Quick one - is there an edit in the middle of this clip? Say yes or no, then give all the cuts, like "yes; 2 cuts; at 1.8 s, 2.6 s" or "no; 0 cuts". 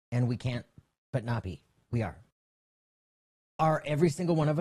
no; 0 cuts